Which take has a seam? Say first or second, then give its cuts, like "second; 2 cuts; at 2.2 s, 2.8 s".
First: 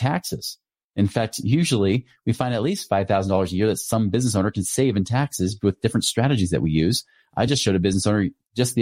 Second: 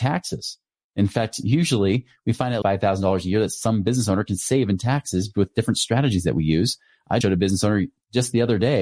second; 2 cuts; at 2.6 s, 7.2 s